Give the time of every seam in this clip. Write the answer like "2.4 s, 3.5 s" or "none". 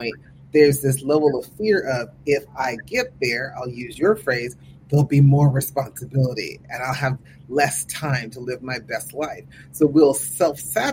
none

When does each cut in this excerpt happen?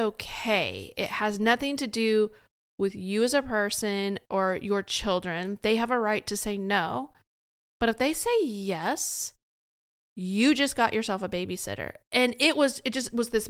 none

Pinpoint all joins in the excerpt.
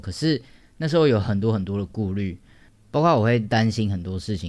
none

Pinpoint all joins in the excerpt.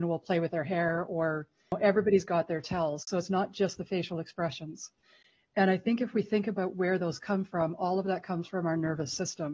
none

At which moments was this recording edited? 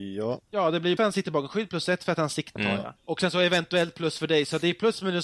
1.0 s, 2.6 s, 3.0 s

